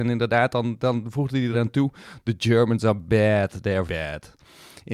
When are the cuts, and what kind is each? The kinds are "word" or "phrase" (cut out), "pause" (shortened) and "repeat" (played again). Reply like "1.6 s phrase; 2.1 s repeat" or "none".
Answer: 1.5 s word; 3.9 s word